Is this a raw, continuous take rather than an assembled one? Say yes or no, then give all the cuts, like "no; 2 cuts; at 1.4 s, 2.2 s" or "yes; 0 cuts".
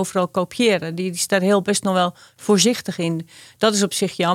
yes; 0 cuts